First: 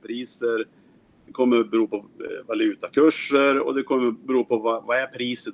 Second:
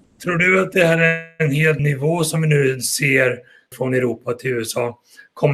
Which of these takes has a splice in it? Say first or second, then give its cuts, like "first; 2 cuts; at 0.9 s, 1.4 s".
second; 2 cuts; at 1.8 s, 3.7 s